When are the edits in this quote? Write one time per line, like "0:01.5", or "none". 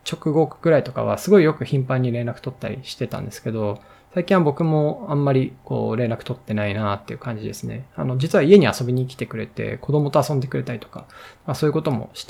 none